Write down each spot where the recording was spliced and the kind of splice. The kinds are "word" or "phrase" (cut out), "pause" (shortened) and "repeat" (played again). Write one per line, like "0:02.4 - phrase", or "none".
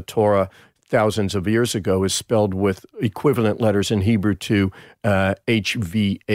none